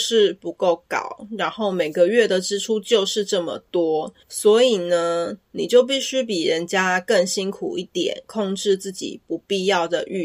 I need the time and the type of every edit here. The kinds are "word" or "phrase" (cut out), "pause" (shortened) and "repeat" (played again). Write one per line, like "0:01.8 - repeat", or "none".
0:04.2 - pause